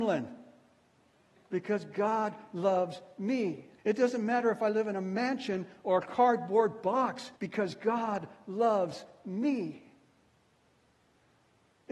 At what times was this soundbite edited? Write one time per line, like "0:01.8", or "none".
0:03.8
0:07.4